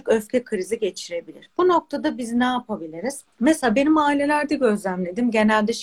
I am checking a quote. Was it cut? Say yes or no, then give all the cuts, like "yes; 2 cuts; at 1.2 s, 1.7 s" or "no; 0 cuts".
yes; 1 cut; at 3.3 s